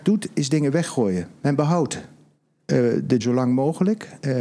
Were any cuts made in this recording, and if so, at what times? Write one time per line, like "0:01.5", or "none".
0:03.2